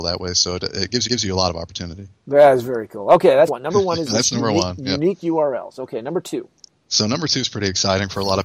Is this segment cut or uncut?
cut